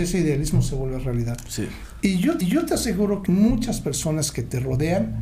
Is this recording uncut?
no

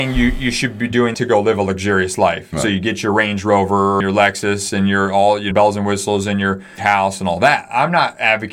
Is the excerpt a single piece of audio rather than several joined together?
no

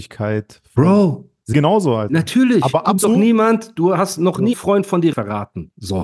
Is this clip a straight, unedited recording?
no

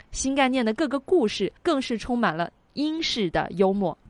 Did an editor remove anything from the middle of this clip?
yes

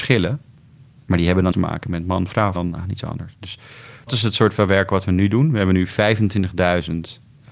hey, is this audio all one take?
no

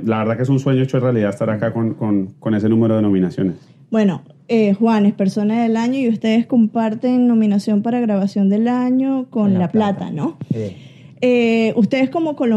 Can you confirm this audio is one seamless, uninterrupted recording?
yes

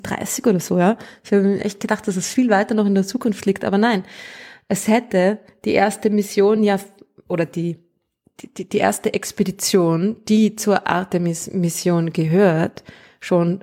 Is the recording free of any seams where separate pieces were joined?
yes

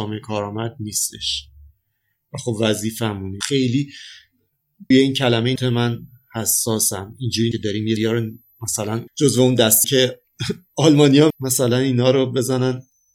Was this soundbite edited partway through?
yes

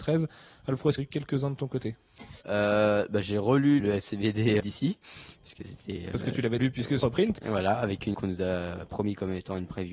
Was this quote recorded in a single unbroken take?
no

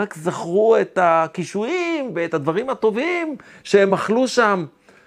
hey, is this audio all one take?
yes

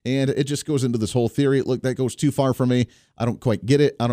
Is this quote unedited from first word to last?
yes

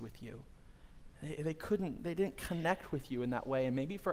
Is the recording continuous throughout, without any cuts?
no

